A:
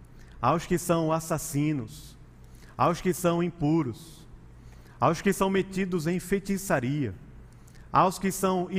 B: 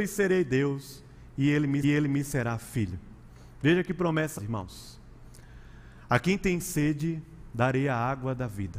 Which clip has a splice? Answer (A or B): B